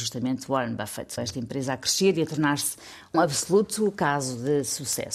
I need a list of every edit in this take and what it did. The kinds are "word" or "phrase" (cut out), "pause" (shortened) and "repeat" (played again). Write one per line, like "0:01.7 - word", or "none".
0:01.2 - phrase
0:03.1 - word